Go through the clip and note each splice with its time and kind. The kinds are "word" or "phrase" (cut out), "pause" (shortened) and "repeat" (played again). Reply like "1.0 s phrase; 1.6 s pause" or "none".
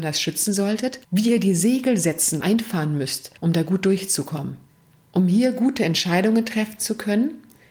1.0 s pause; 2.4 s word; 3.4 s pause; 4.7 s pause